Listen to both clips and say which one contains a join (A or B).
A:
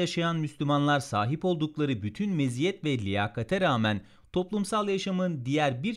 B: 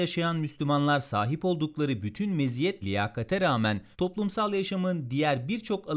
B